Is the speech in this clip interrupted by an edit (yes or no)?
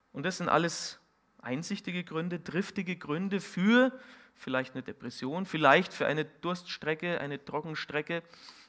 no